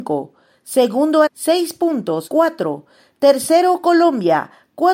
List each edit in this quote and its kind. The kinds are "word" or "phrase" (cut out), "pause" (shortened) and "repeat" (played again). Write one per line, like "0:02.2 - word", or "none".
0:01.3 - word
0:02.3 - word